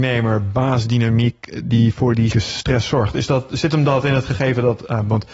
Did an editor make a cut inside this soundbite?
yes; 1 cut; at 2.3 s

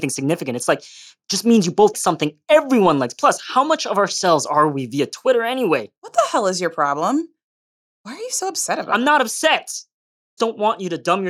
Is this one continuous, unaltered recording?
no; 2 cuts; at 1.9 s, 10.4 s

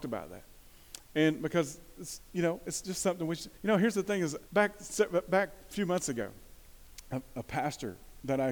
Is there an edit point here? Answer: yes; 2 cuts; at 3.6 s, 4.5 s

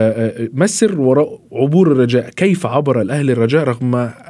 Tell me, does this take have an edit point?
no; 0 cuts

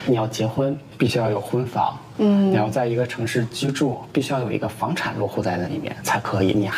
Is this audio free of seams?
yes; 0 cuts

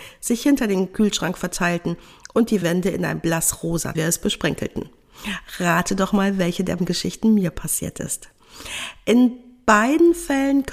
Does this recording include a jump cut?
yes; 3 cuts; at 2.6 s, 3.9 s, 6.8 s

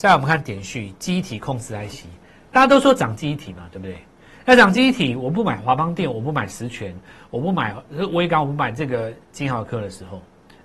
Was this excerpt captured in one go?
yes; 0 cuts

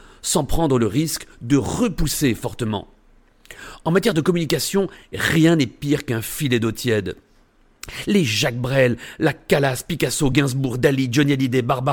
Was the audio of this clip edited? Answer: no; 0 cuts

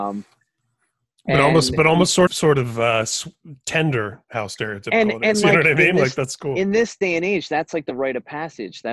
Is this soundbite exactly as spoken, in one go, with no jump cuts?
no; 1 cut; at 2.3 s

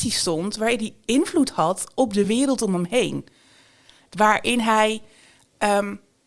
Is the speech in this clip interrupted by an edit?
no; 0 cuts

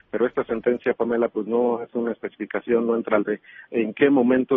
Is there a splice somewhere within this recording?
yes; 1 cut; at 3.3 s

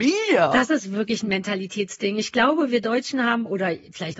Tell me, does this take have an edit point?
no; 0 cuts

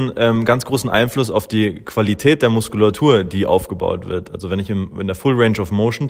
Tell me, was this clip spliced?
no; 0 cuts

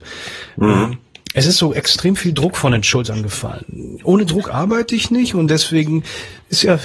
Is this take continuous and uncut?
yes; 0 cuts

